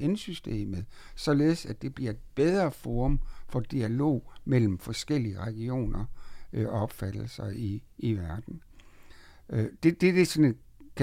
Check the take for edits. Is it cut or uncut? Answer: uncut